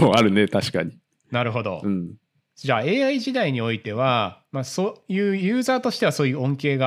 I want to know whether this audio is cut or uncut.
cut